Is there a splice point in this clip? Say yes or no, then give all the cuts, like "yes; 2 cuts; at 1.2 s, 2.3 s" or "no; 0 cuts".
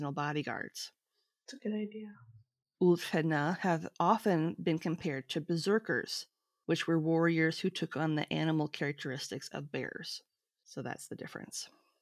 no; 0 cuts